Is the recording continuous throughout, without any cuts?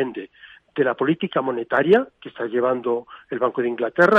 yes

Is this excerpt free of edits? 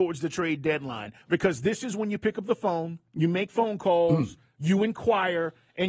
no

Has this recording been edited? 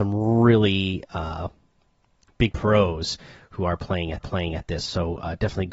yes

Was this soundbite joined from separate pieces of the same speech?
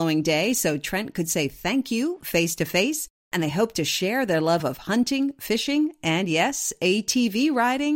no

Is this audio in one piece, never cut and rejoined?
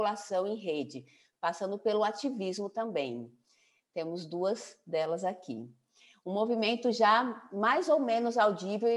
yes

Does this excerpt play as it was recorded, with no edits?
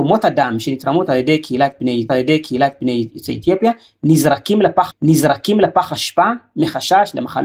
no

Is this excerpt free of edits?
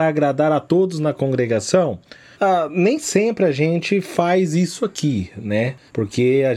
yes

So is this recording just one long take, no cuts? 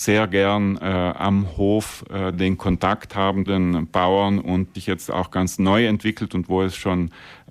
no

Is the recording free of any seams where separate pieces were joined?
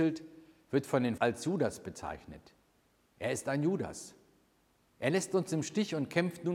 no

